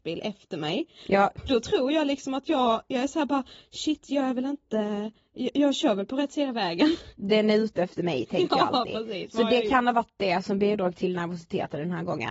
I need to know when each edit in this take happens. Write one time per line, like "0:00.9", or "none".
none

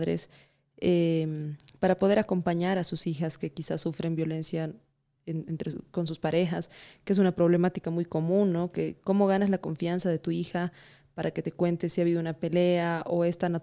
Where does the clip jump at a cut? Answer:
none

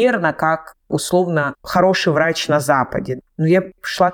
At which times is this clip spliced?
none

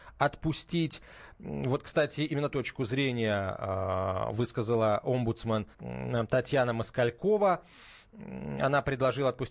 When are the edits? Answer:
0:02.5
0:05.7

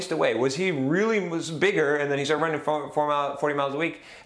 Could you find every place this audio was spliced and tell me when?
none

